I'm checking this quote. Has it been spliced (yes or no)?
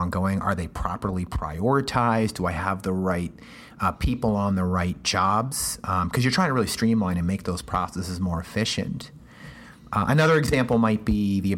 no